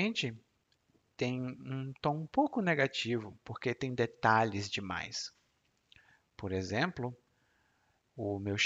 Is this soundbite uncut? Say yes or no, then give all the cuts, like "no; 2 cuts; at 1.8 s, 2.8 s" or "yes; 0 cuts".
yes; 0 cuts